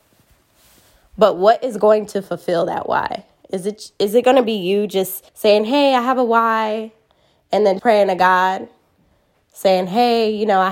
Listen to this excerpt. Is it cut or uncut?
cut